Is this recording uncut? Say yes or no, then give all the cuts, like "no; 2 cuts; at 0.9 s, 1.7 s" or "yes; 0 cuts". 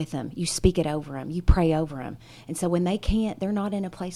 yes; 0 cuts